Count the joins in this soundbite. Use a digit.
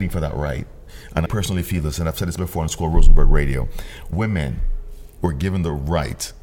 2